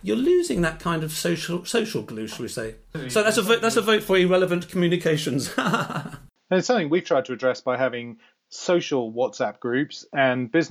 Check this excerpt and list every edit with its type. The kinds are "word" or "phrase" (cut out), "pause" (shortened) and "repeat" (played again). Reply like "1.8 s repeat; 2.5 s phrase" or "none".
none